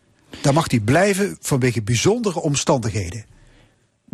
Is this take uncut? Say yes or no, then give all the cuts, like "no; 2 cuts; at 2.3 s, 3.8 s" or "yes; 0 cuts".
yes; 0 cuts